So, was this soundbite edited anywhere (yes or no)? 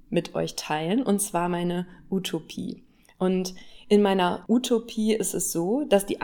no